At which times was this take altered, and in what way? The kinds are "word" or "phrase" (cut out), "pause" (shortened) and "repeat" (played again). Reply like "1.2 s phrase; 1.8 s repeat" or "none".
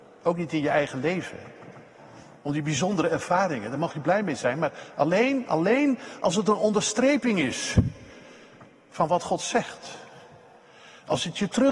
none